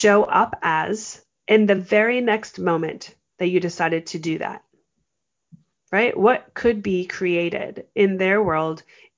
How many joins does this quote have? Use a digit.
0